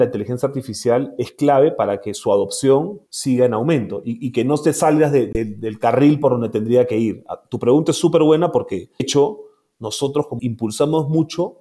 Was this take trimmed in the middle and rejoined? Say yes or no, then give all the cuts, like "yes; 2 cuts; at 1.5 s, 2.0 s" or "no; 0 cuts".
yes; 3 cuts; at 3.1 s, 9.0 s, 10.4 s